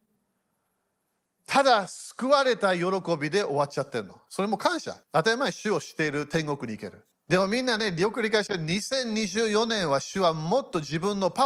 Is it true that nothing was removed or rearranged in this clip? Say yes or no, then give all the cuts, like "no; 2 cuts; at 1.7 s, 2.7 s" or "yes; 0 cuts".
no; 2 cuts; at 5.0 s, 7.1 s